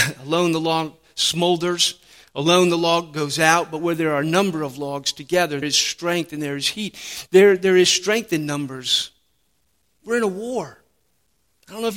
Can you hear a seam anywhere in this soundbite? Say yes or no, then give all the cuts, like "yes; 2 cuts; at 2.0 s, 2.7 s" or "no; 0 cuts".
yes; 1 cut; at 5.6 s